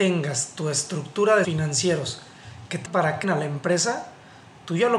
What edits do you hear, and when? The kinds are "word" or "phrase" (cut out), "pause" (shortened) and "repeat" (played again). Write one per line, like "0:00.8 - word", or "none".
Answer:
0:01.4 - word
0:02.9 - word
0:03.2 - word